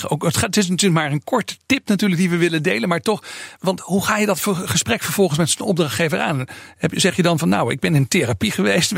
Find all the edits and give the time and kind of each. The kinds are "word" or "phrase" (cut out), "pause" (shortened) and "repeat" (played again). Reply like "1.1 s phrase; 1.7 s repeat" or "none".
3.6 s word